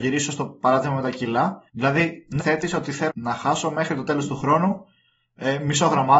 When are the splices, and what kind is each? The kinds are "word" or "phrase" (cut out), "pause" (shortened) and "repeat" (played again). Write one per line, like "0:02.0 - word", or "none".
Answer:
0:01.7 - pause
0:02.4 - word
0:03.1 - word